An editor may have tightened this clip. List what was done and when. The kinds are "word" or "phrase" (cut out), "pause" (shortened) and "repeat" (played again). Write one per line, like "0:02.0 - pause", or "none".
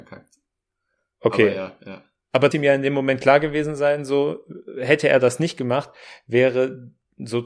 0:02.5 - phrase